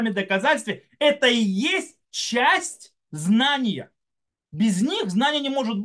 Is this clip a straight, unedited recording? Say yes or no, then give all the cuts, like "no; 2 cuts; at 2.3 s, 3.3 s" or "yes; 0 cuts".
yes; 0 cuts